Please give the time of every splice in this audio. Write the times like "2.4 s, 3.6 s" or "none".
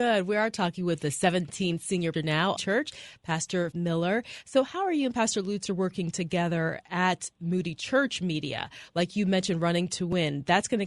2.1 s, 2.6 s, 3.7 s